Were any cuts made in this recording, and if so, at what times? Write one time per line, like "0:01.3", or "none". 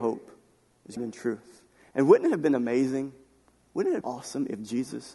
0:01.0
0:04.0